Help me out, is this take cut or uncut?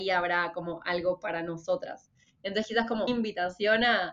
cut